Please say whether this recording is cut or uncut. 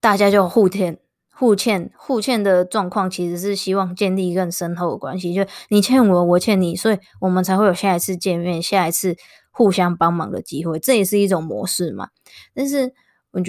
uncut